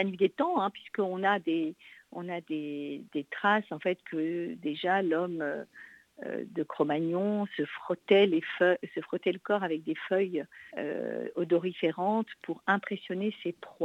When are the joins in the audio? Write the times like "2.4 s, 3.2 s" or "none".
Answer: 10.7 s